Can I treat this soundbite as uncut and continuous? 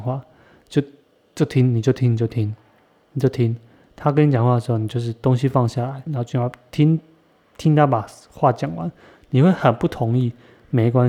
no; 1 cut; at 6.1 s

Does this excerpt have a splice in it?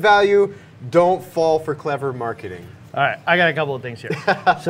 no; 0 cuts

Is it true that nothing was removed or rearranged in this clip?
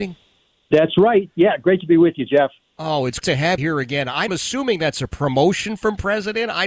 no; 3 cuts; at 3.2 s, 3.6 s, 4.3 s

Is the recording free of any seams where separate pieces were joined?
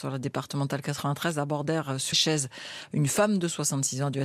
no; 1 cut; at 2.1 s

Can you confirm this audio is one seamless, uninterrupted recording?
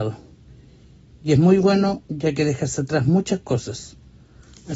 yes; 0 cuts

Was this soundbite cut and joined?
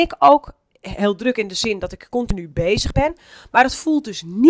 no; 0 cuts

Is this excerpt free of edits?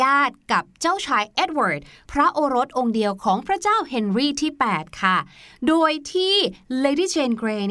yes; 0 cuts

